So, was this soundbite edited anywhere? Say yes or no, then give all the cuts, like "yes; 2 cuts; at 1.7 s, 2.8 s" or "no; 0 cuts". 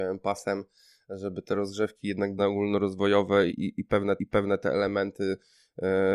yes; 3 cuts; at 2.4 s, 3.5 s, 4.2 s